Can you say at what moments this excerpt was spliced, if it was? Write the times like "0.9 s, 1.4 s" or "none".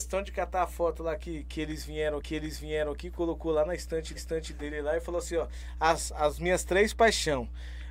2.2 s, 4.2 s